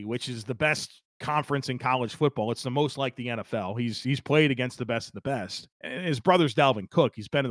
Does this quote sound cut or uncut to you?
cut